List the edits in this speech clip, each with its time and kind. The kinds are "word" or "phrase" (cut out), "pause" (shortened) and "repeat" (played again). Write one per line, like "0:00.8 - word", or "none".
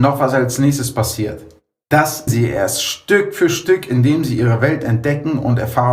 0:02.3 - word